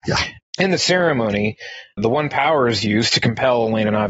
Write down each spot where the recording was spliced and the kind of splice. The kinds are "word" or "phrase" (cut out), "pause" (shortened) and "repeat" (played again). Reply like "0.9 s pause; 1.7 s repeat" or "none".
none